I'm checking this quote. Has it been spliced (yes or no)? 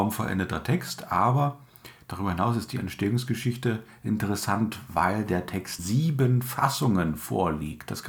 yes